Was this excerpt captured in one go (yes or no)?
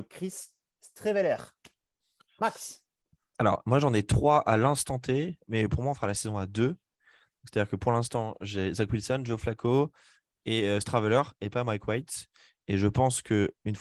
yes